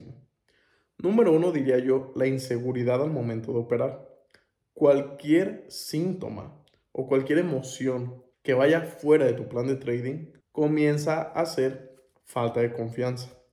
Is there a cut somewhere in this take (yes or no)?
yes